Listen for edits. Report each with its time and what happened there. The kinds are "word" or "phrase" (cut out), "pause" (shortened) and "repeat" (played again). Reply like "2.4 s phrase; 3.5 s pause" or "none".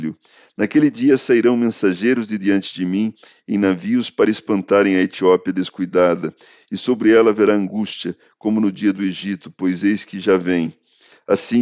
none